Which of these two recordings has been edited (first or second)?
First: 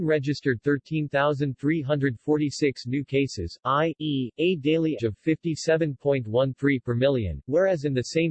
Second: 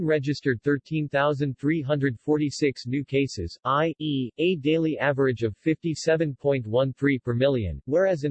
first